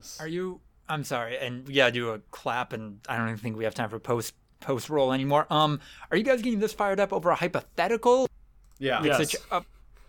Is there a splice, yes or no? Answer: no